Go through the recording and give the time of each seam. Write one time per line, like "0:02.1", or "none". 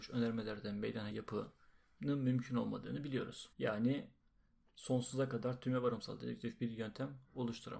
0:01.1
0:03.5